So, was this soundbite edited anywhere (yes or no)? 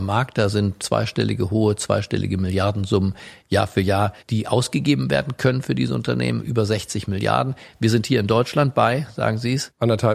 yes